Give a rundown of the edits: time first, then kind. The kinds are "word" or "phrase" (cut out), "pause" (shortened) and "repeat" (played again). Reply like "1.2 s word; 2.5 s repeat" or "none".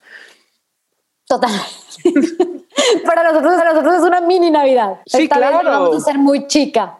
3.0 s word; 3.6 s repeat; 5.0 s pause